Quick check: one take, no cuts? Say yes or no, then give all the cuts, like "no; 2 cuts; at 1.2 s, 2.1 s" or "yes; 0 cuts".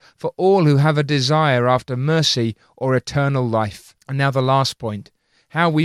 no; 1 cut; at 4.0 s